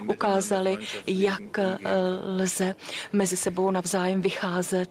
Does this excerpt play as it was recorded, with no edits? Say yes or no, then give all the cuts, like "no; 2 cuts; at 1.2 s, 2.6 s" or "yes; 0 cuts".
yes; 0 cuts